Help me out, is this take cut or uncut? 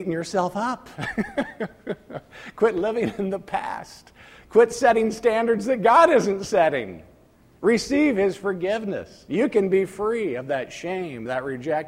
uncut